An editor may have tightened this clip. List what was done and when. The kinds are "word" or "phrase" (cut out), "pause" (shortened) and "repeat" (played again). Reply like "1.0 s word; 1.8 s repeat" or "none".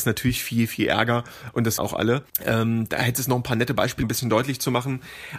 1.8 s word; 2.3 s pause; 4.0 s phrase